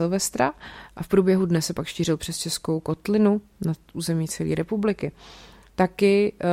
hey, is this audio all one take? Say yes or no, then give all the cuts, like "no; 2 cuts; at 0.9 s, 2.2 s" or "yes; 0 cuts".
yes; 0 cuts